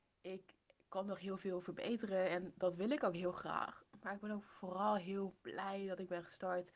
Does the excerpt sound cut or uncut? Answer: uncut